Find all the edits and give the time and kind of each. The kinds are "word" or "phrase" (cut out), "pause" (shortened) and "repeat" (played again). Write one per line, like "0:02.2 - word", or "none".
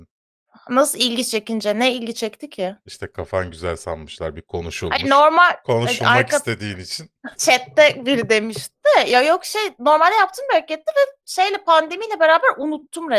0:07.3 - pause